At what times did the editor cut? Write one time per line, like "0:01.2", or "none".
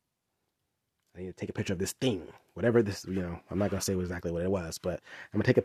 none